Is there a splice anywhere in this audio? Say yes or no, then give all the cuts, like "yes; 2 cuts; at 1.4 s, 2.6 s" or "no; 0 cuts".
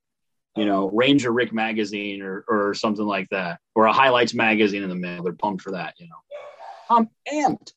yes; 1 cut; at 3.6 s